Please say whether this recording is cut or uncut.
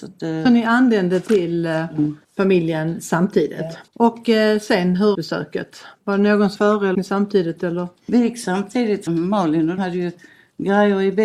cut